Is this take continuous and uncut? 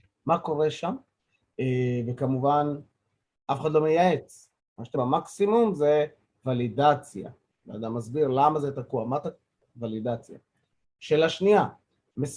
no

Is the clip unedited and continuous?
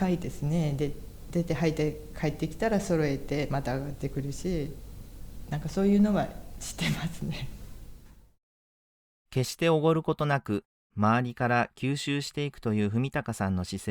yes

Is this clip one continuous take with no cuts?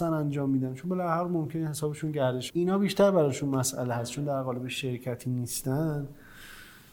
no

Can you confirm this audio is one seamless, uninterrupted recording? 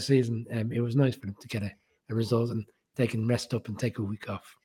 yes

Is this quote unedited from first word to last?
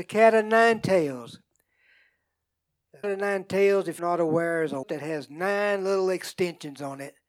no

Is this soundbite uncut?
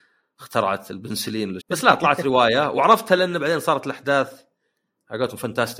no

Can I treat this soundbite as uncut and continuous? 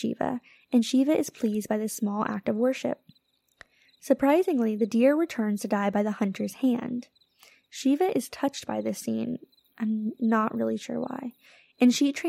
yes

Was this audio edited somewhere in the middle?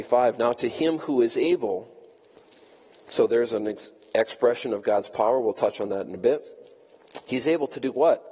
no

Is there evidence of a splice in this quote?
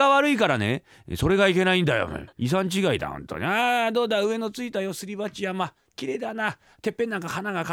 yes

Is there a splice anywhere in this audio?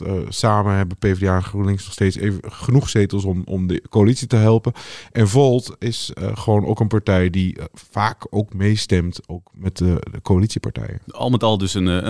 no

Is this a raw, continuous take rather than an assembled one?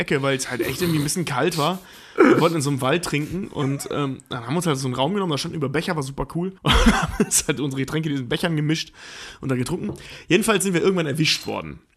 no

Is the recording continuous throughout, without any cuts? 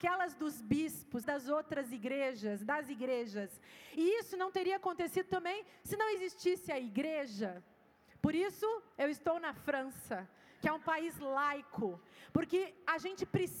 no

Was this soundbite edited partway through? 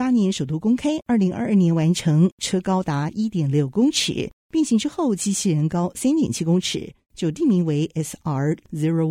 no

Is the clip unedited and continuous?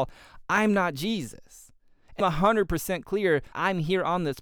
no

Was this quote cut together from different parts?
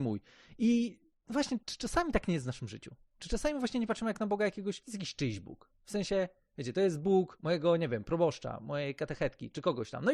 no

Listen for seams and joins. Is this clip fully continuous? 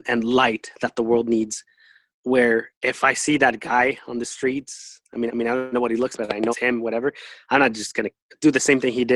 no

